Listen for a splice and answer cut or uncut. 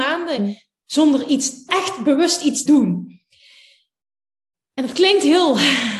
cut